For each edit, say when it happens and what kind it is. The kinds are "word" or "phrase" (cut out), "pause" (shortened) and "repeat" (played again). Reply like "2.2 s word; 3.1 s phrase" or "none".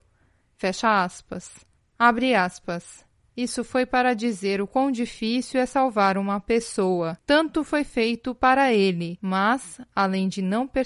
none